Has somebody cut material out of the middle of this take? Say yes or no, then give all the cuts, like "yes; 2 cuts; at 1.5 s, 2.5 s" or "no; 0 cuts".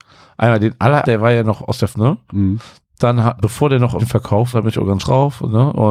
yes; 6 cuts; at 1.0 s, 1.9 s, 3.4 s, 4.0 s, 4.5 s, 5.0 s